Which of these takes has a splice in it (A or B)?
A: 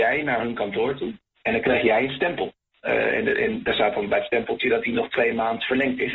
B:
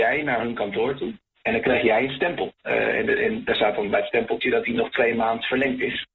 B